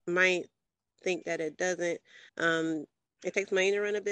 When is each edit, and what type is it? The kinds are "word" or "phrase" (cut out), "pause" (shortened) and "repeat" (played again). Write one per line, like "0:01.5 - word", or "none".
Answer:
0:02.3 - pause